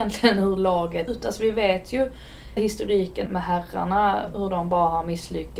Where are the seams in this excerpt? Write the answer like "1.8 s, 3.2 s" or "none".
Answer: 1.1 s, 2.6 s, 3.3 s